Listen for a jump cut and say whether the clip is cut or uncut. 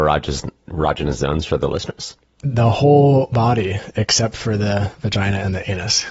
uncut